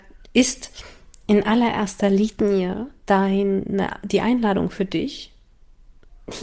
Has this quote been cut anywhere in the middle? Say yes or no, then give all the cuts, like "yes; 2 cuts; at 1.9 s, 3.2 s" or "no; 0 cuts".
no; 0 cuts